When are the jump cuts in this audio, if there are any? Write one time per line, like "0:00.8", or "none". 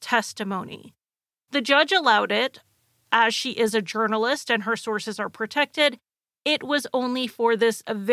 0:03.1